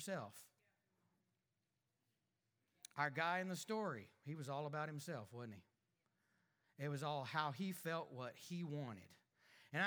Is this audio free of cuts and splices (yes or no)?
yes